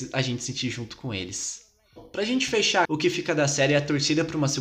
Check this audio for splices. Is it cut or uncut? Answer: cut